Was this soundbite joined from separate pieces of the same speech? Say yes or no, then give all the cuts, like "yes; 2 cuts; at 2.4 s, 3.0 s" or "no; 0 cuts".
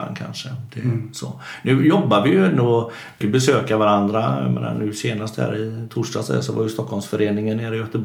yes; 1 cut; at 3.2 s